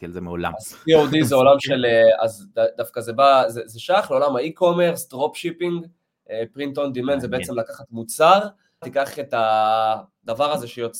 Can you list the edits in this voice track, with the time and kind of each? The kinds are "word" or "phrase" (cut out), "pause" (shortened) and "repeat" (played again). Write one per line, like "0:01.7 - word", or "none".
0:08.8 - phrase